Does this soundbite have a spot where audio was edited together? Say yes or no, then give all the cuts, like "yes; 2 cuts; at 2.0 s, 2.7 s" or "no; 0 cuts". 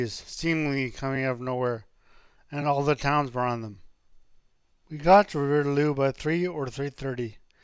no; 0 cuts